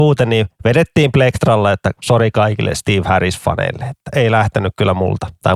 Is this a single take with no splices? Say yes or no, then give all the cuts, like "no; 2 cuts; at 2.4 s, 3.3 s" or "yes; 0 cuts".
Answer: yes; 0 cuts